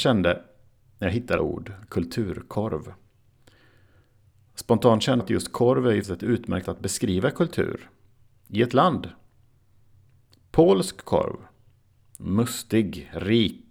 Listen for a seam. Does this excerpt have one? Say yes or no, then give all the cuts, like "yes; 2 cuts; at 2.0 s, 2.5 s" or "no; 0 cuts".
yes; 4 cuts; at 1.4 s, 5.2 s, 6.0 s, 6.6 s